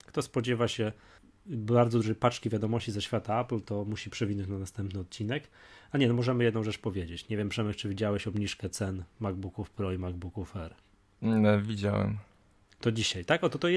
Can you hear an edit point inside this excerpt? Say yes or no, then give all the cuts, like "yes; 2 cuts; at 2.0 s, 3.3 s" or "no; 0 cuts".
no; 0 cuts